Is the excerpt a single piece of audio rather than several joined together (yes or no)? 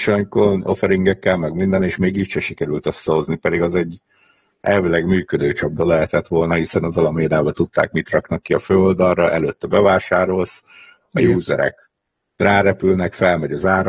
yes